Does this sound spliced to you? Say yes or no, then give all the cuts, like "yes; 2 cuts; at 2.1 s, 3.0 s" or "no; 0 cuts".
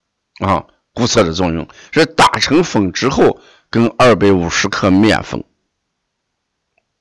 no; 0 cuts